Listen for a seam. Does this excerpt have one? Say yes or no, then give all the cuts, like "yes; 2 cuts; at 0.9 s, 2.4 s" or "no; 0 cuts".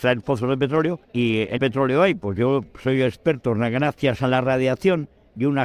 yes; 2 cuts; at 1.0 s, 1.6 s